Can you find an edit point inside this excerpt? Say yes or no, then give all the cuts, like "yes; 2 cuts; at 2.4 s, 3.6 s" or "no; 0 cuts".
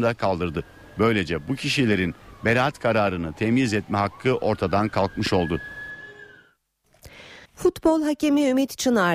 yes; 1 cut; at 7.5 s